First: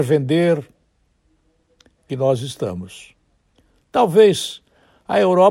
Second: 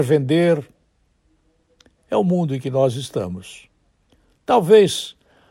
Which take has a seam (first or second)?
first